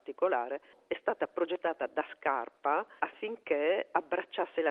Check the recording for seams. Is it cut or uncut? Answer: cut